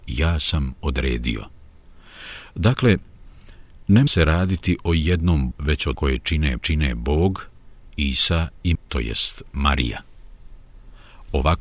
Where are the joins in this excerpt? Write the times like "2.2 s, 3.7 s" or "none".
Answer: 4.1 s, 5.5 s, 5.9 s, 6.6 s, 8.7 s